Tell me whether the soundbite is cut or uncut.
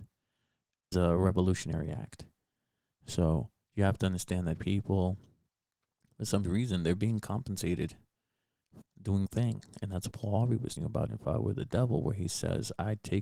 cut